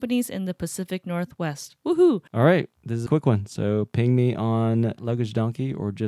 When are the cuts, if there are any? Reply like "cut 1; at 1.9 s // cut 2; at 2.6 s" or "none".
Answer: cut 1; at 2.3 s // cut 2; at 3.1 s // cut 3; at 5.0 s